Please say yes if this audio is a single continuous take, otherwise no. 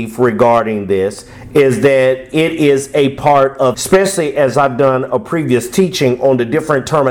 no